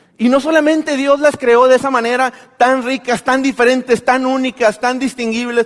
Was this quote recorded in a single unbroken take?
yes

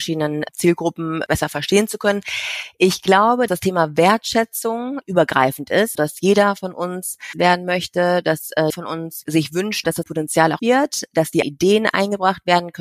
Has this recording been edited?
yes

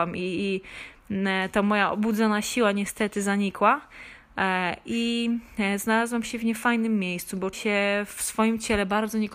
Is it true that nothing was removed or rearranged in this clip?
no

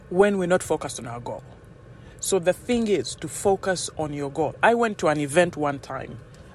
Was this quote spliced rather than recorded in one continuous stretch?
no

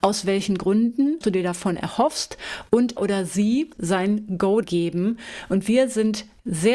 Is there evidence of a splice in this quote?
yes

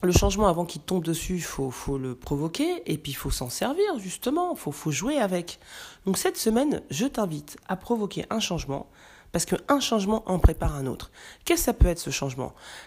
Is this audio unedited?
yes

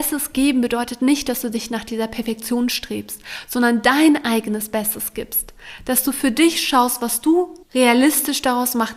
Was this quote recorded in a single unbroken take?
no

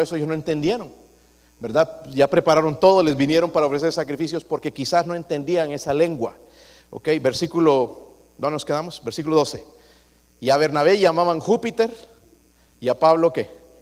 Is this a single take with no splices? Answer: yes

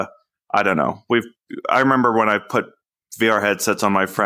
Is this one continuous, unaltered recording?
yes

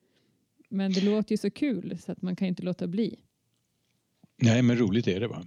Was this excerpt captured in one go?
yes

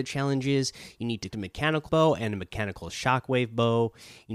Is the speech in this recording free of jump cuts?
no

